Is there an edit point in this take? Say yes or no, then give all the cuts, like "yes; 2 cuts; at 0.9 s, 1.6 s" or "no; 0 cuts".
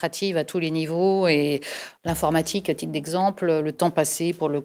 no; 0 cuts